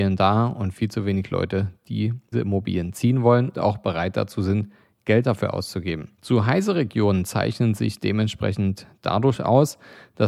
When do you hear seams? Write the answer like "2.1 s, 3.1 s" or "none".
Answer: 2.3 s, 3.5 s, 6.1 s